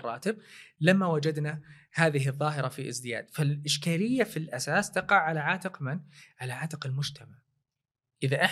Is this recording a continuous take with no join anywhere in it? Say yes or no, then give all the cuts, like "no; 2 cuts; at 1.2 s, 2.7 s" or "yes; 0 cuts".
yes; 0 cuts